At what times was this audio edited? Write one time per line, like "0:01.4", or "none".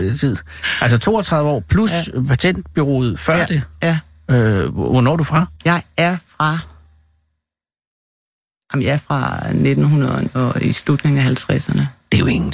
0:05.6